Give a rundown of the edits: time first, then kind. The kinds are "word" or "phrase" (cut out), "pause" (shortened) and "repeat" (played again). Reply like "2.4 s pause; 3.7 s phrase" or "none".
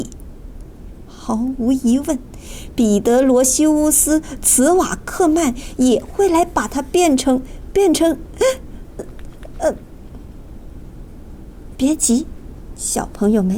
9.0 s word; 11.7 s word